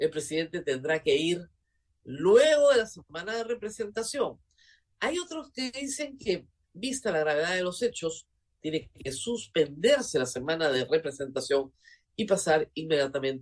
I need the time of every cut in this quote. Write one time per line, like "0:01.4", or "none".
none